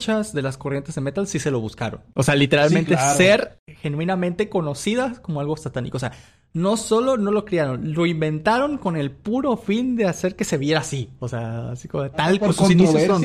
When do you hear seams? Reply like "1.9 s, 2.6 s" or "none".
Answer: none